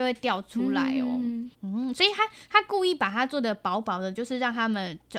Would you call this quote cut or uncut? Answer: cut